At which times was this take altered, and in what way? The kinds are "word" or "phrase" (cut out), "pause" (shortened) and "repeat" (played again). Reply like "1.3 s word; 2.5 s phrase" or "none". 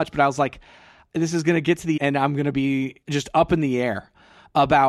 2.0 s word; 3.0 s pause